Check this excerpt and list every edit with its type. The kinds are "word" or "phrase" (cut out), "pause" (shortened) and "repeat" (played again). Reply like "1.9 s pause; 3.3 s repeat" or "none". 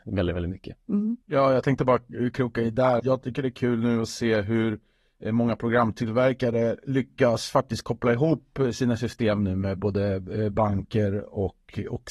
1.2 s pause; 3.0 s word